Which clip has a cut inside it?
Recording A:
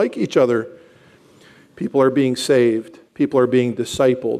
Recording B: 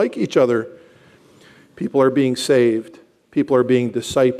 A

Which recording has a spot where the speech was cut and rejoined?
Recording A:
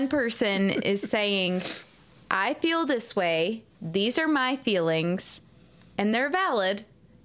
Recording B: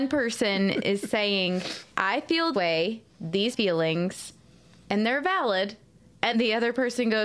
B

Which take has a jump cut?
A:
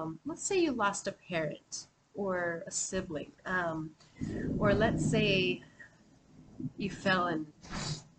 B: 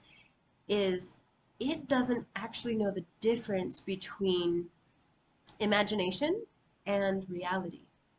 A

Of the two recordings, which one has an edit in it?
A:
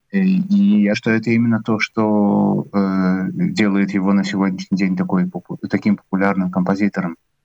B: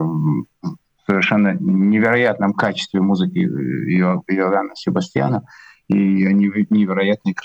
A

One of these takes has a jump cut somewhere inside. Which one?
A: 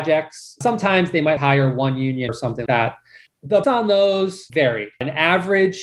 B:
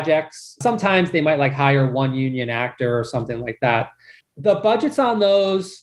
A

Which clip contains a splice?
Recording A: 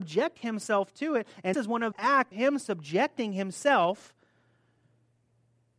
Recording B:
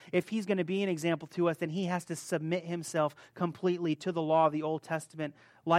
A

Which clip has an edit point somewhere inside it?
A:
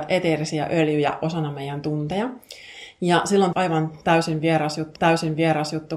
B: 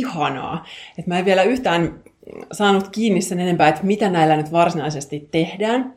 A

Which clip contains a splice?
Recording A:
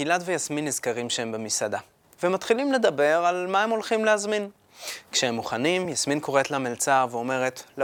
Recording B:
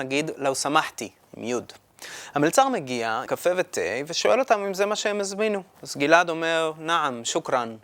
B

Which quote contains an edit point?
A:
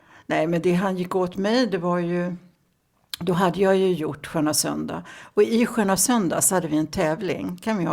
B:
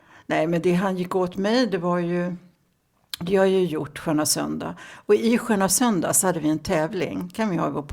B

